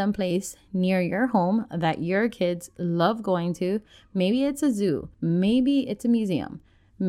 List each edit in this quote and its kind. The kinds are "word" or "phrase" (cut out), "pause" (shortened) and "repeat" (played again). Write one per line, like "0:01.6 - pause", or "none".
0:05.1 - pause